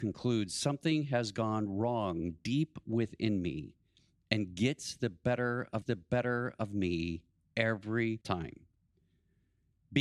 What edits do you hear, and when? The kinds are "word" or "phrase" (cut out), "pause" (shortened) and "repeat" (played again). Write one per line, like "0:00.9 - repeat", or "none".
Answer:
0:05.8 - repeat
0:08.2 - pause